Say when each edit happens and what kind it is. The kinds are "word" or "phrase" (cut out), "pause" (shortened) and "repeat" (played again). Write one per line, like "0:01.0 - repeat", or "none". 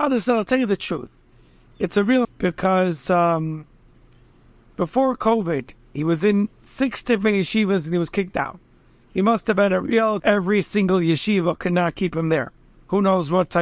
0:02.2 - word
0:10.2 - phrase